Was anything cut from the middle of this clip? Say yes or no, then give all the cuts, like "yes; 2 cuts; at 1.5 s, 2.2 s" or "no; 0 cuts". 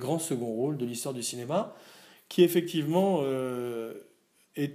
no; 0 cuts